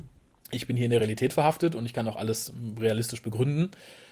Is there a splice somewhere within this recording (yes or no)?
no